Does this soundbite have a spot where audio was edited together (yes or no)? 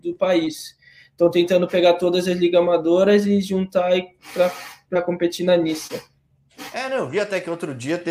no